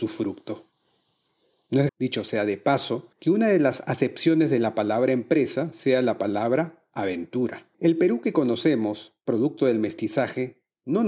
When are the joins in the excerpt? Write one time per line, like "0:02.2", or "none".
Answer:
0:01.9
0:03.1
0:07.7